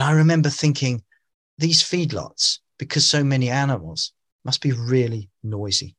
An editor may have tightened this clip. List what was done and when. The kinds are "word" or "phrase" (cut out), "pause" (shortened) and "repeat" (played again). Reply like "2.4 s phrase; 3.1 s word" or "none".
none

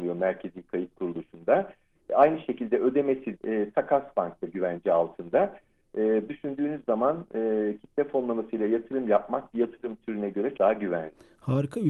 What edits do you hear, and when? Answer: 3.4 s word; 6.3 s word; 9.5 s word; 10.6 s word

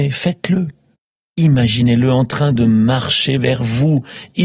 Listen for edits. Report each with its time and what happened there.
0.9 s pause

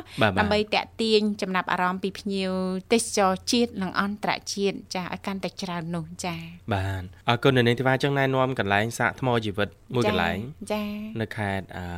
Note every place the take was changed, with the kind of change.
7.2 s pause

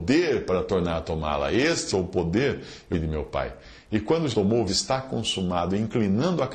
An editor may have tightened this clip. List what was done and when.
1.9 s word; 2.9 s word; 4.3 s word; 4.7 s phrase

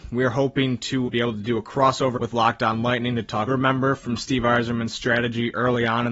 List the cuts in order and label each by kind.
1.1 s word; 2.2 s word; 3.5 s phrase

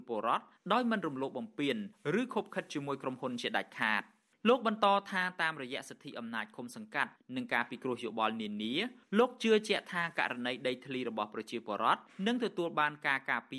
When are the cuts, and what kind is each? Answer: none

